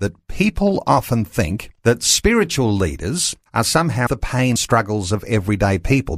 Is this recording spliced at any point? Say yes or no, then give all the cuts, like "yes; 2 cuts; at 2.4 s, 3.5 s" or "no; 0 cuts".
yes; 4 cuts; at 1.8 s, 3.5 s, 4.1 s, 4.6 s